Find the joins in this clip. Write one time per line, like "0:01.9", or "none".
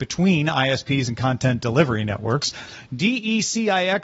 none